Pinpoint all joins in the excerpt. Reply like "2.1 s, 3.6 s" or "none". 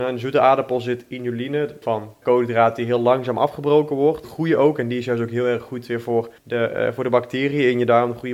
1.8 s, 2.2 s, 4.2 s, 6.4 s